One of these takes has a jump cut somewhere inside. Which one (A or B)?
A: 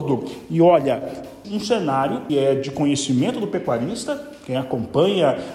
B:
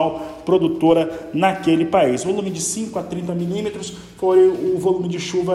A